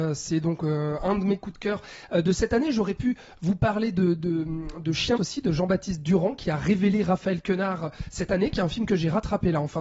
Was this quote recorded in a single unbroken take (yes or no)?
no